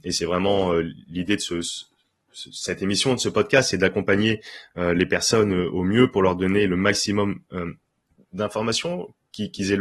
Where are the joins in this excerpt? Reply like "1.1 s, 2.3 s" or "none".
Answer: none